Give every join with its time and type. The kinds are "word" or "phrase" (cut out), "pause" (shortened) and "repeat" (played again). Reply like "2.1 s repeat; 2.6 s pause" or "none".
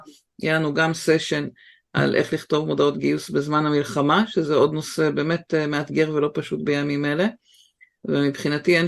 none